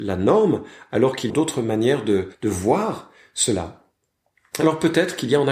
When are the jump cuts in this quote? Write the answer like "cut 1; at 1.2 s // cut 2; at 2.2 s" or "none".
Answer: cut 1; at 1.3 s // cut 2; at 2.3 s